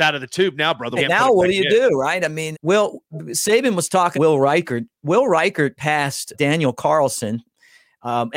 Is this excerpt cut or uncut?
cut